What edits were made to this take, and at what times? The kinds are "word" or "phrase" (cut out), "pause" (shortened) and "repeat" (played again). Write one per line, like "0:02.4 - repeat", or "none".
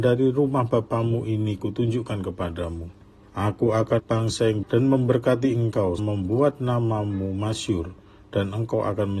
0:01.6 - phrase
0:03.2 - pause
0:04.0 - phrase
0:04.6 - word
0:06.0 - word